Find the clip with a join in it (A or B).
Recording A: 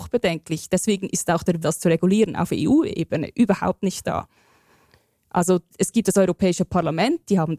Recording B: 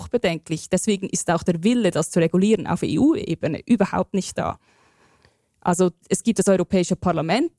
A